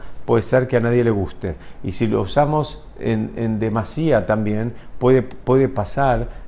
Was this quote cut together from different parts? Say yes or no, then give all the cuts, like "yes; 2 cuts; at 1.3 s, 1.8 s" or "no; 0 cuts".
no; 0 cuts